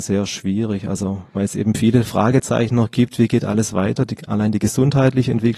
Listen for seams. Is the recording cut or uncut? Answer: uncut